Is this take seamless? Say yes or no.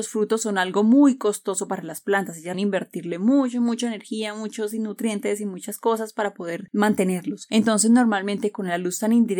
no